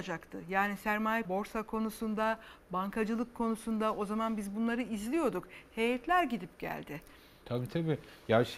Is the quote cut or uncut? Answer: cut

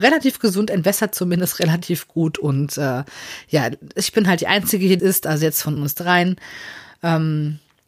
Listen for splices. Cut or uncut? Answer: cut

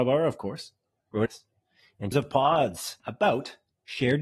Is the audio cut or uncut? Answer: cut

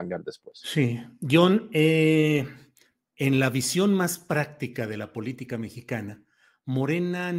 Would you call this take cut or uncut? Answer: uncut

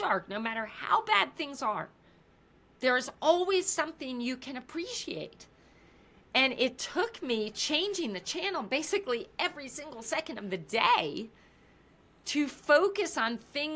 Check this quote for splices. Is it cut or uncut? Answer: uncut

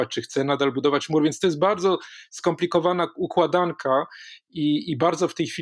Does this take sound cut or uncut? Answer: uncut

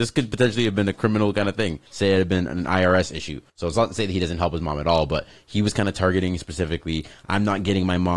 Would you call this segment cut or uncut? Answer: cut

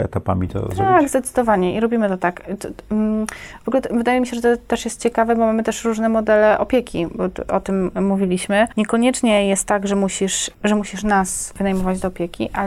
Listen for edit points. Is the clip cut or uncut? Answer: uncut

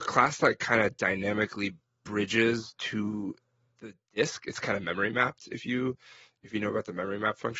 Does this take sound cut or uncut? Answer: uncut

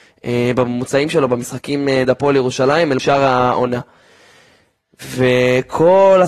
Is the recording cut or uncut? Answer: cut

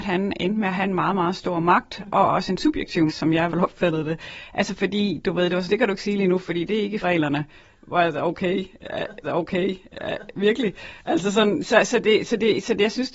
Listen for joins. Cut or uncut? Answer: cut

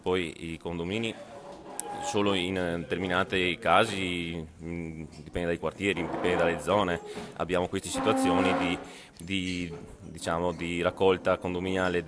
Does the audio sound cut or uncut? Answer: uncut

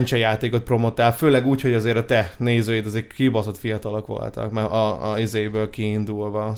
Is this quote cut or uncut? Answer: uncut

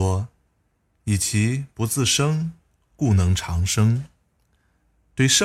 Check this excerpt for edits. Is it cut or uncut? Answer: uncut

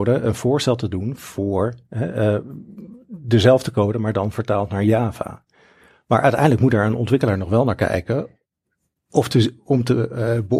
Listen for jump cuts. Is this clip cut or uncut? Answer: uncut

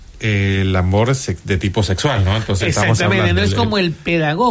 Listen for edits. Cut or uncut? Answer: uncut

